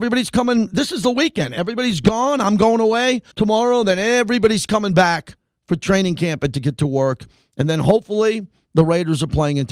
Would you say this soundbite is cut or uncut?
cut